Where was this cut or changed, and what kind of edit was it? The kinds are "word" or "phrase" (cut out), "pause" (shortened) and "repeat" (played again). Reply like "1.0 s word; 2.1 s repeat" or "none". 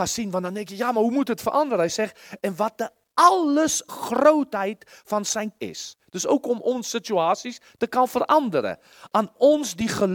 3.9 s word; 5.6 s word